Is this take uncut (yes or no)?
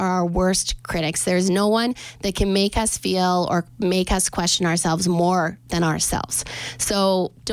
yes